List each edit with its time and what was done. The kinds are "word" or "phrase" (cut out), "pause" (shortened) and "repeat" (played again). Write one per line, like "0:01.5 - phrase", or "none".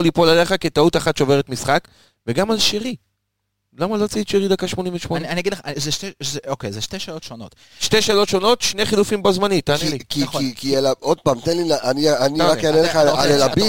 0:05.7 - word

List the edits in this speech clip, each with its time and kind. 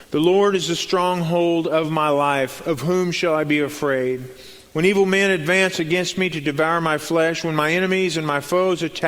none

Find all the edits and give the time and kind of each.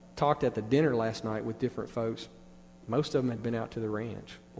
0:03.4 - word

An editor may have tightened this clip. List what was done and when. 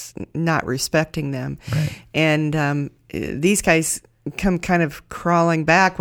none

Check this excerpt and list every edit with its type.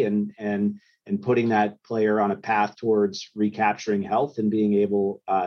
none

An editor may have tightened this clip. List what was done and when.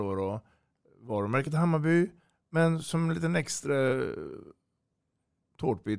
none

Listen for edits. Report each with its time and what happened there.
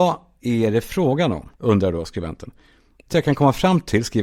0:01.5 - pause
0:03.1 - word

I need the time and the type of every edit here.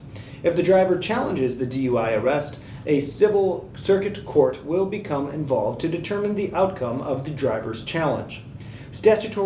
none

